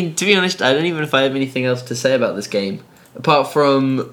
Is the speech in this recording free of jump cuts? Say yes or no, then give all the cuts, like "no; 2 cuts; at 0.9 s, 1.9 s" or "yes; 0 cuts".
yes; 0 cuts